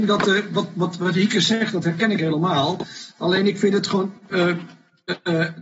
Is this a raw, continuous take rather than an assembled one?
yes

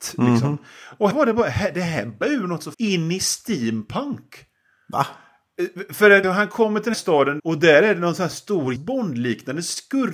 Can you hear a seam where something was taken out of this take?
yes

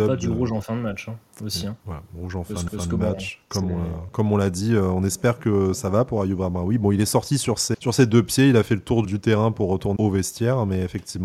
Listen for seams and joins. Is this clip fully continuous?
no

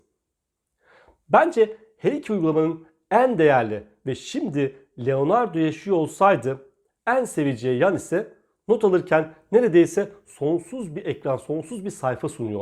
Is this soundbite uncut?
yes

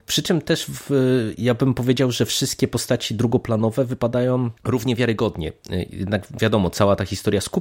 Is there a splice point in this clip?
yes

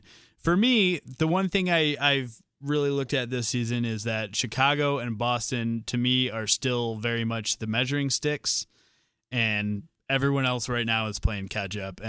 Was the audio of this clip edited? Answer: no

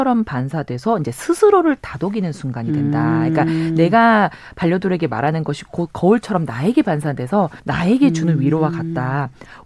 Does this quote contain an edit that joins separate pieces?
yes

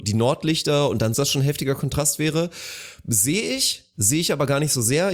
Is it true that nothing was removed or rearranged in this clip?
no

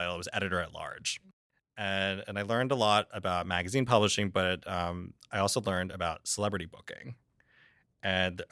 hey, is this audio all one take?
yes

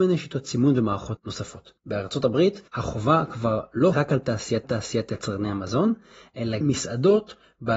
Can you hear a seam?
yes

